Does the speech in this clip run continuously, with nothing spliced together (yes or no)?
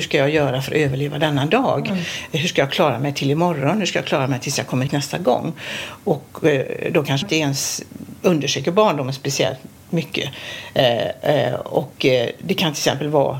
no